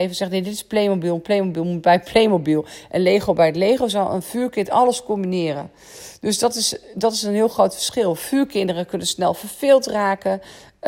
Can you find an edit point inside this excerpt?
no; 0 cuts

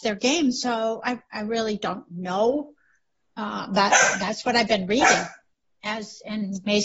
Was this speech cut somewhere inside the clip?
no; 0 cuts

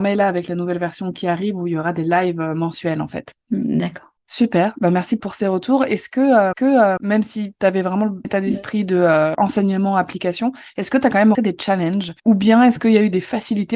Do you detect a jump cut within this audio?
yes; 6 cuts; at 4.2 s, 5.2 s, 6.5 s, 8.2 s, 11.3 s, 12.2 s

